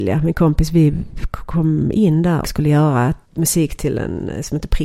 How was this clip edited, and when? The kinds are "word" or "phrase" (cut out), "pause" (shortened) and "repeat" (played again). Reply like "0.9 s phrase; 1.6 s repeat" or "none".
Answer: 2.4 s word; 3.2 s pause